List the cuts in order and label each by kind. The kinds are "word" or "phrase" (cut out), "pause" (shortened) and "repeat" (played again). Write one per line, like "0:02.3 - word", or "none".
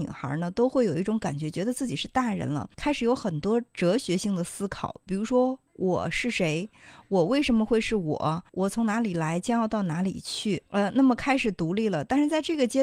0:02.7 - pause
0:08.5 - pause
0:10.7 - pause